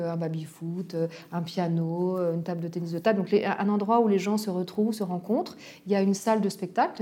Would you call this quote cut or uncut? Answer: uncut